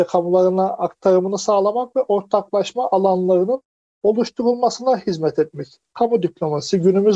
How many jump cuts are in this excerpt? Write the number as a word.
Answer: zero